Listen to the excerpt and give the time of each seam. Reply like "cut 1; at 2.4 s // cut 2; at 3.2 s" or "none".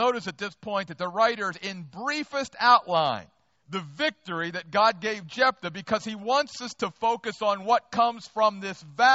cut 1; at 1.5 s // cut 2; at 3.6 s

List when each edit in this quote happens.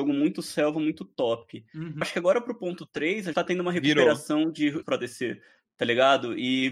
cut 1; at 2.0 s // cut 2; at 3.3 s // cut 3; at 4.8 s

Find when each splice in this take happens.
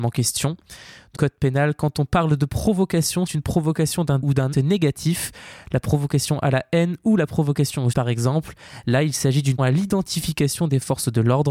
cut 1; at 1.1 s // cut 2; at 3.3 s // cut 3; at 4.2 s // cut 4; at 4.5 s // cut 5; at 7.9 s // cut 6; at 9.6 s

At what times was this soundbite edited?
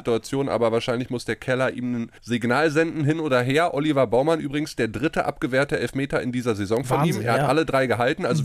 cut 1; at 2.2 s

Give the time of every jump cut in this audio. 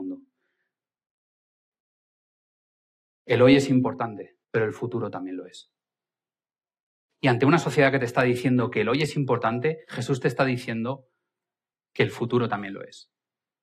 cut 1; at 4.4 s

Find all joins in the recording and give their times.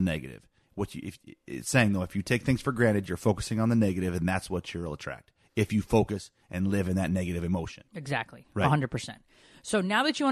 cut 1; at 7.9 s

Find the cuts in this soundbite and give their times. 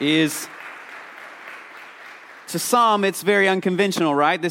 cut 1; at 2.4 s

